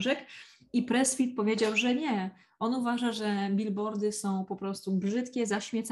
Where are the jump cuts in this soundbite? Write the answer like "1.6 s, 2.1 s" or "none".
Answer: none